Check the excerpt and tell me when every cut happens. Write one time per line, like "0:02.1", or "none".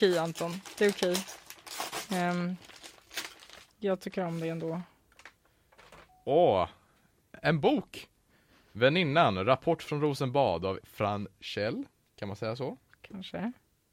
0:10.8

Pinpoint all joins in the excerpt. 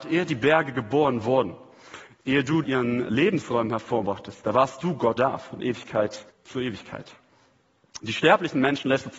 0:02.6
0:05.2
0:06.3

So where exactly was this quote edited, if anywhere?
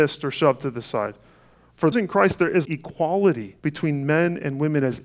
0:01.9
0:02.6
0:03.6

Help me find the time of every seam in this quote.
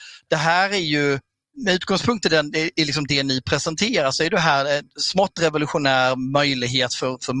none

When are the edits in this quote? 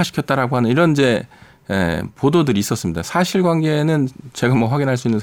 none

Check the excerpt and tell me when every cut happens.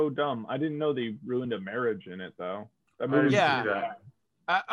none

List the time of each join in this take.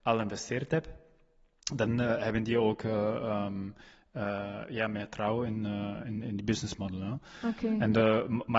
0:06.2

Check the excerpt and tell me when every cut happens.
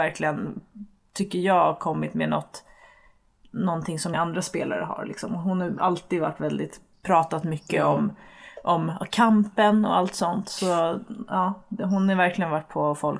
0:04.1

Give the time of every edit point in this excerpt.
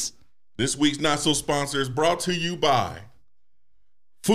none

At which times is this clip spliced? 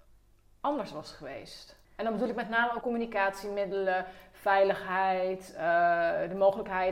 0:01.8
0:02.8

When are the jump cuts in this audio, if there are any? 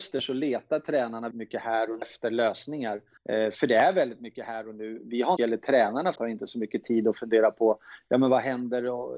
0:01.3
0:02.0
0:03.2
0:05.4
0:06.2

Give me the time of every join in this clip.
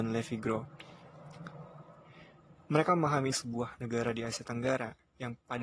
0:03.3

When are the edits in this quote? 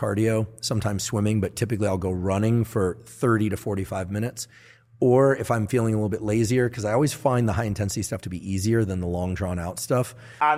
none

